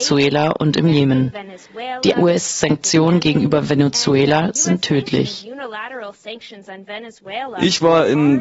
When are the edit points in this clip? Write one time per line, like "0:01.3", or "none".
none